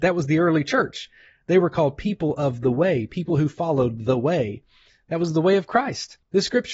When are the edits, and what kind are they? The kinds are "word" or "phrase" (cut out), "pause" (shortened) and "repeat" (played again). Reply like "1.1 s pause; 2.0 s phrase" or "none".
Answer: none